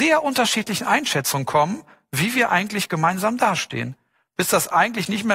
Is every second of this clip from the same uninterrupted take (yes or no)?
yes